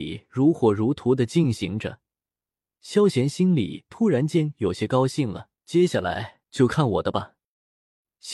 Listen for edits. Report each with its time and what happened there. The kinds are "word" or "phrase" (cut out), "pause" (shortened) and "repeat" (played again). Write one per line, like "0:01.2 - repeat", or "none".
0:05.5 - pause
0:06.5 - pause